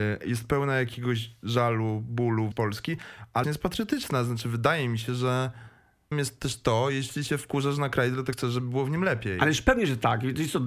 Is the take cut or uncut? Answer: cut